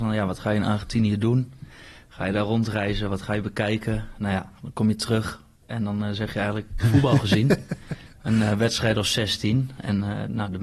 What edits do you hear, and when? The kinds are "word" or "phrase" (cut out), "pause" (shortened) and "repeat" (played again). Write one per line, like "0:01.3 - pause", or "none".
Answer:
0:06.8 - phrase

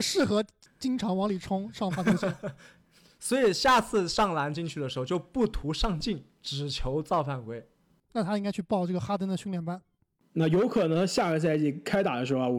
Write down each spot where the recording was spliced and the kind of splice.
none

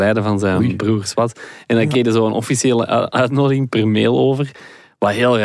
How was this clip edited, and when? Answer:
none

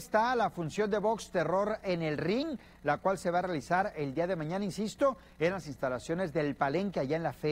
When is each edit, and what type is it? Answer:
none

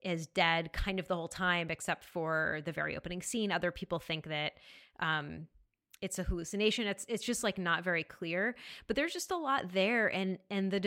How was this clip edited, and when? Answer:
none

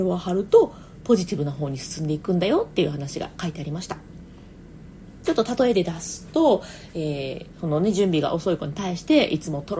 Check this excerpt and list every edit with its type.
none

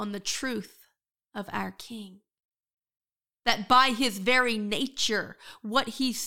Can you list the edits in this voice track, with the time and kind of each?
none

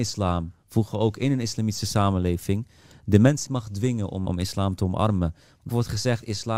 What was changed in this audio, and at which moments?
0:03.5 - word
0:04.3 - word
0:05.7 - word

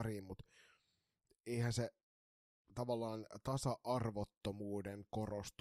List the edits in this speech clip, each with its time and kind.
none

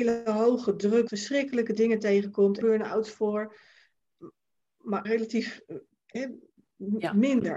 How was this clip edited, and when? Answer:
0:01.1 - word
0:02.6 - phrase
0:05.0 - word

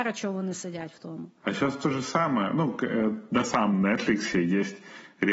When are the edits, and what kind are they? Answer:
0:03.4 - phrase

